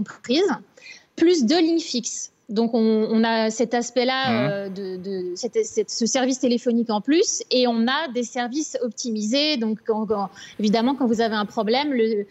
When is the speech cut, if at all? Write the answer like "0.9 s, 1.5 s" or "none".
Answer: none